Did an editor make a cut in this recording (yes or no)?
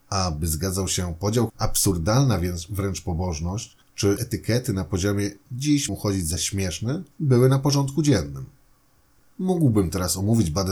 yes